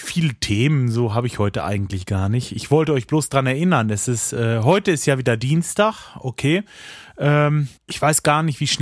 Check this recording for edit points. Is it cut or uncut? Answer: cut